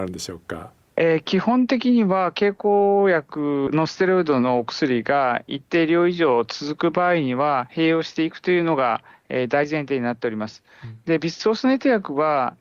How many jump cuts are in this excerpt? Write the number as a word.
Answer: one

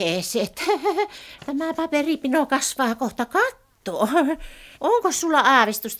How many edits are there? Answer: one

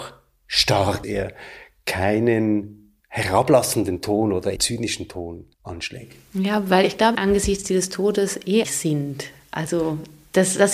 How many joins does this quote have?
six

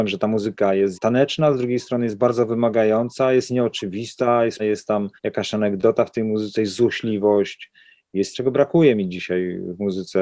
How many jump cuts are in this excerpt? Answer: four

